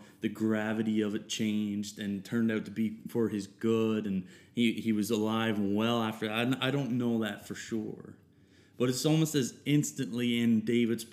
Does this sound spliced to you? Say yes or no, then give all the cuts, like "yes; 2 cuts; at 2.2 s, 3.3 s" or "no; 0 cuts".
no; 0 cuts